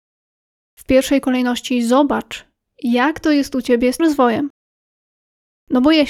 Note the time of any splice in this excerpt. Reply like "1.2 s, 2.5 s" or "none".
4.0 s

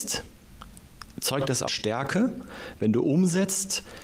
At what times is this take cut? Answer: 1.7 s

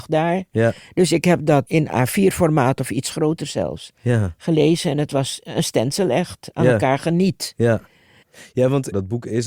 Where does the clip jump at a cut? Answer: none

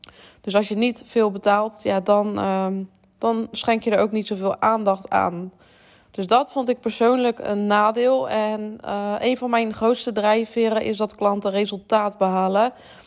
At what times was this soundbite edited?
none

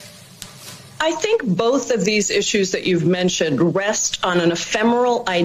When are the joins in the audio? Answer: none

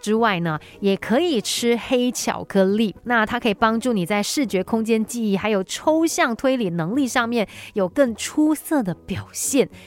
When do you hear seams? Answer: 3.0 s

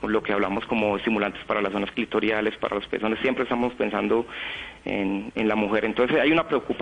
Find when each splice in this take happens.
5.3 s

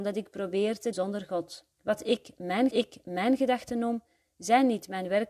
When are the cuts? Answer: 0.9 s, 1.7 s, 2.7 s

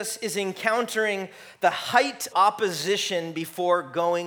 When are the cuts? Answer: 2.3 s

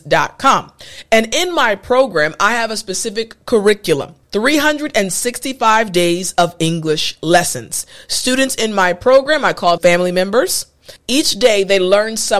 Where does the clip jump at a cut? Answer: 4.2 s, 9.8 s, 11.0 s

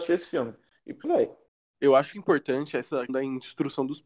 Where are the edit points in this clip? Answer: 1.0 s, 2.1 s, 3.1 s

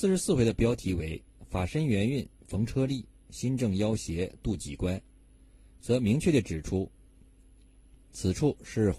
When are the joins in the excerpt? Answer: none

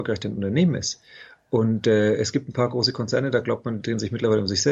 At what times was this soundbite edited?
none

